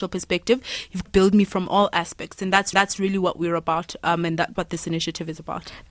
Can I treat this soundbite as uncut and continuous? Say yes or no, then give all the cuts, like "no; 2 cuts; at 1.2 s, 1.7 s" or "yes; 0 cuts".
no; 3 cuts; at 1.1 s, 2.7 s, 4.6 s